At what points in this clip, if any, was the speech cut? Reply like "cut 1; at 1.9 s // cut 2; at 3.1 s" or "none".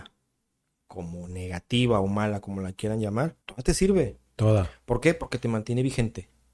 cut 1; at 3.4 s